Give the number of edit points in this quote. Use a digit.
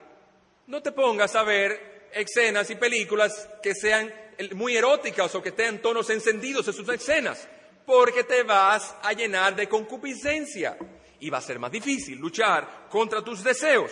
0